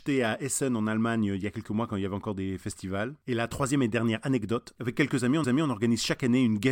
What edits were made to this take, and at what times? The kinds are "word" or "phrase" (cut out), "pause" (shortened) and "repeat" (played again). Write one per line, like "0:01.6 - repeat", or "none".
0:05.4 - repeat